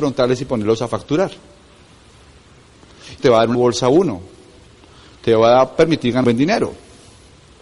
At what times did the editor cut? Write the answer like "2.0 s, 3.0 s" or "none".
3.2 s, 3.5 s, 6.2 s